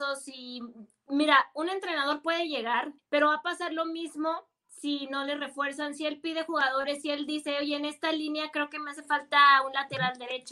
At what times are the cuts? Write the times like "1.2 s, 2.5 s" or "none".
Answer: 3.0 s